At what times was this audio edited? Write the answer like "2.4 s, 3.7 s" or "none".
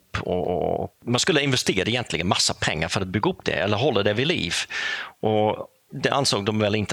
none